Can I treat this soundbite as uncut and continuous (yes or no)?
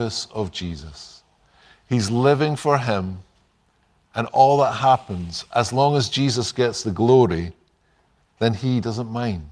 yes